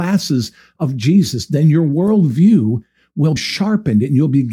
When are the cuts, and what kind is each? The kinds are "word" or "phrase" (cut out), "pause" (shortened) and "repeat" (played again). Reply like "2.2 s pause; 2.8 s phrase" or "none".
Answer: 3.4 s word